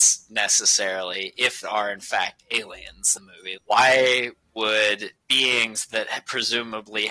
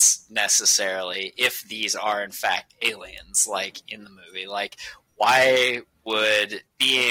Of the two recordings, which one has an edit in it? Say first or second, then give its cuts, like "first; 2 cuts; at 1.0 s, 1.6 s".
first; 3 cuts; at 1.6 s, 3.2 s, 3.6 s